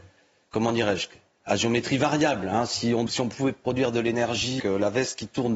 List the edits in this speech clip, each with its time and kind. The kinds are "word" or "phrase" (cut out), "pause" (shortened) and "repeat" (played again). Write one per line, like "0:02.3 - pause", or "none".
0:03.1 - word
0:04.6 - word

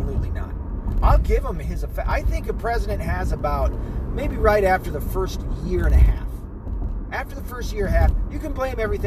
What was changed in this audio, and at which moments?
none

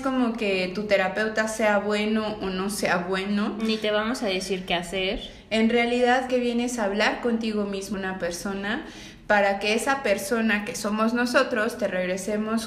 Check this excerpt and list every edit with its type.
0:06.3 - word
0:07.9 - phrase

